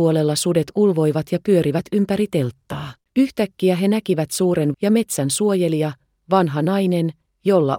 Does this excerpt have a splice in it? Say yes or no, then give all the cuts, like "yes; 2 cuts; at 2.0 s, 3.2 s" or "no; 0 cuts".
yes; 2 cuts; at 3.0 s, 4.7 s